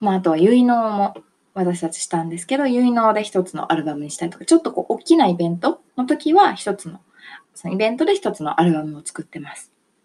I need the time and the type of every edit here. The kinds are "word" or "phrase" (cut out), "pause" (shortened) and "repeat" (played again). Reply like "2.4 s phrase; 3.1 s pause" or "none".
5.9 s pause; 7.4 s pause